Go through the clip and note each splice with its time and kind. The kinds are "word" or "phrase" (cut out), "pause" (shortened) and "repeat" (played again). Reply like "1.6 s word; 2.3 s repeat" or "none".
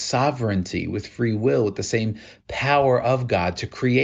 none

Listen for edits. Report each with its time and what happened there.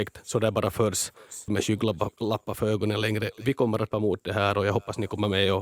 1.5 s phrase; 3.9 s word

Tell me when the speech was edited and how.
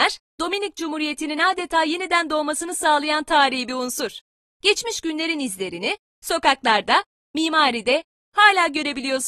none

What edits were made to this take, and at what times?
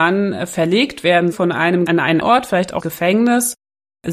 1.3 s word; 1.9 s word; 2.2 s word; 2.8 s phrase

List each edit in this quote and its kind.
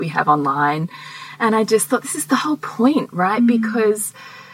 none

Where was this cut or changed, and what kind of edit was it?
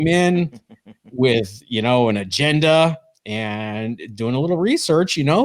none

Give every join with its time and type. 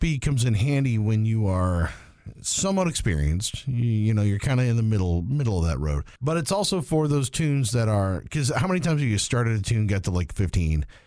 6.2 s pause

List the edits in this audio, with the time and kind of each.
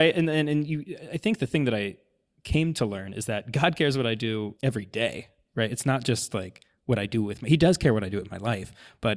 none

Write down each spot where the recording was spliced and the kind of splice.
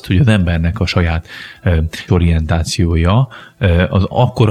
2.1 s word

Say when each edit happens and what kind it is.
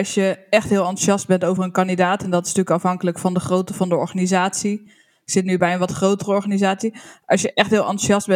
none

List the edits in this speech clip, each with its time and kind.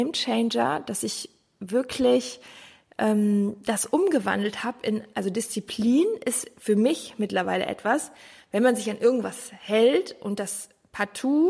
none

